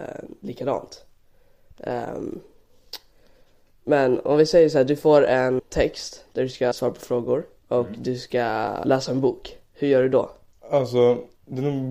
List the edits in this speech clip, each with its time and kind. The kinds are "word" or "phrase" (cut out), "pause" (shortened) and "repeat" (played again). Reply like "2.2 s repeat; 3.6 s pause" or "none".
5.6 s word; 6.7 s word; 8.8 s word